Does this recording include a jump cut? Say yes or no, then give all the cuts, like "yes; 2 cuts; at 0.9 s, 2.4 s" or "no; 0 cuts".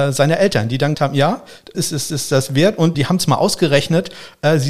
yes; 4 cuts; at 0.9 s, 1.7 s, 2.1 s, 2.9 s